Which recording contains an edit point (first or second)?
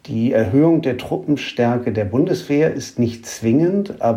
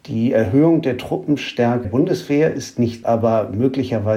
second